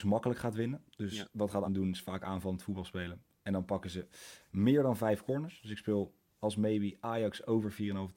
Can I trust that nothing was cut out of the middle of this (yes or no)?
no